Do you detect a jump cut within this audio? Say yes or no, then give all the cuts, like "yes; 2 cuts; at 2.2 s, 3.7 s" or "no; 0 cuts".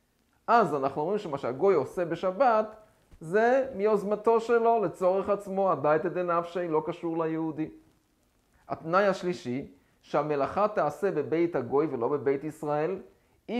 no; 0 cuts